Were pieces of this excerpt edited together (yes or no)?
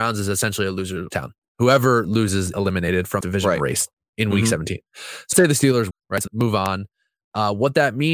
yes